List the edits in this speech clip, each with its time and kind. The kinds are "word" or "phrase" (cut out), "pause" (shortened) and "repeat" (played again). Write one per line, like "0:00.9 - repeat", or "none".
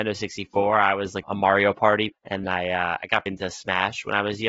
0:01.2 - word
0:02.1 - word
0:02.4 - word
0:03.3 - word